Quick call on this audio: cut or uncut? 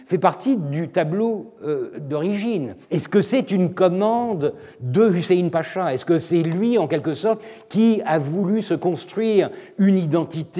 cut